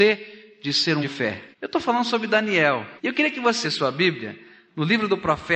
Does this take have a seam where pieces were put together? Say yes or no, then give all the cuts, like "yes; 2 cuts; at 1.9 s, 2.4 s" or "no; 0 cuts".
yes; 4 cuts; at 1.0 s, 1.5 s, 3.0 s, 3.6 s